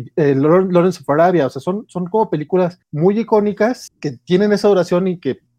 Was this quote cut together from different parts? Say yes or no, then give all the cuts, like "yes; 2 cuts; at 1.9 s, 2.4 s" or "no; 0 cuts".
no; 0 cuts